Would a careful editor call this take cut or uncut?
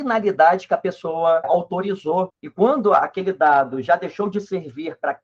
uncut